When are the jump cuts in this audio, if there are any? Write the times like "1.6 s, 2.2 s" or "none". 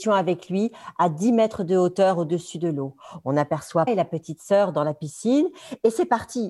3.9 s